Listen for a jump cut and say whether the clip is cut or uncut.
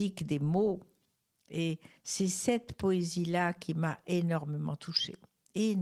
cut